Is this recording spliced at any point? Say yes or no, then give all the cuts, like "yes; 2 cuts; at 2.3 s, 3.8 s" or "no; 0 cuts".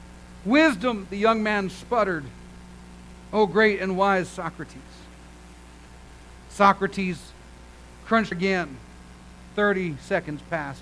yes; 1 cut; at 8.3 s